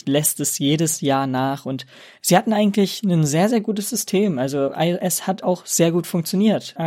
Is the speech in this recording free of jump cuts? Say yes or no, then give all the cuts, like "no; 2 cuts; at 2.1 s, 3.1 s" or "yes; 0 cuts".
yes; 0 cuts